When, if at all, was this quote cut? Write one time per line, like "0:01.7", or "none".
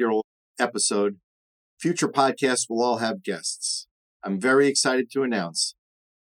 none